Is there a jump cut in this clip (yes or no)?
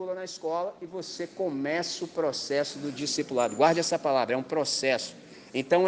no